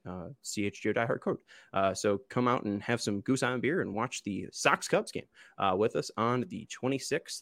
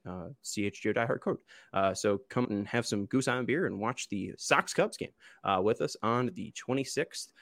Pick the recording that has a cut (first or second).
second